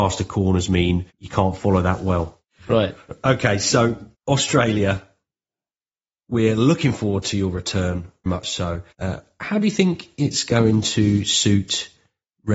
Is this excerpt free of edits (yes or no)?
no